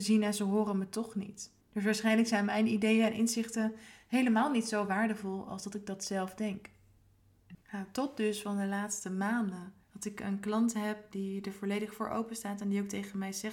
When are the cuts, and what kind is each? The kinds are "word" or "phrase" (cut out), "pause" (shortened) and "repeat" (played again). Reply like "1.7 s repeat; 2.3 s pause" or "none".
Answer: 1.6 s pause; 7.6 s pause; 9.8 s pause